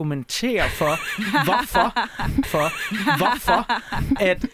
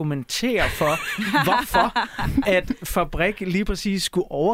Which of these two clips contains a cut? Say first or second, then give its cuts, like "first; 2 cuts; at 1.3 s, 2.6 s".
first; 1 cut; at 2.4 s